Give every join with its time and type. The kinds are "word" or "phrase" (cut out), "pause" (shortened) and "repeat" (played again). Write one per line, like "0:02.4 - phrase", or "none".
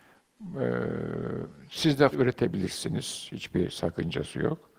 0:02.1 - phrase